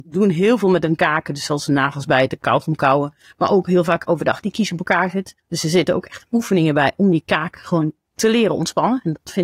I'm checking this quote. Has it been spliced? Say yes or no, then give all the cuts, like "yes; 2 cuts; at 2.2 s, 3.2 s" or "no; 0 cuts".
yes; 1 cut; at 5.4 s